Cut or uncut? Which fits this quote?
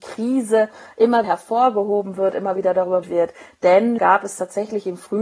cut